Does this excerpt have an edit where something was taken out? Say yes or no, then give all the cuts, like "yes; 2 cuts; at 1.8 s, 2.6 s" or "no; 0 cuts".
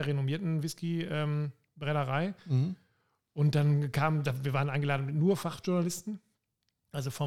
no; 0 cuts